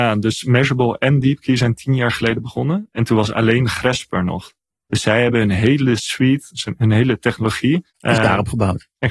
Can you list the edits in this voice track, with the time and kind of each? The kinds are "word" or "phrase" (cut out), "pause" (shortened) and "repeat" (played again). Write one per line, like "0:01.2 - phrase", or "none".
0:04.7 - pause
0:07.9 - pause